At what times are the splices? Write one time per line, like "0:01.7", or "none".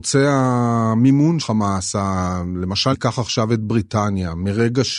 0:01.4
0:02.9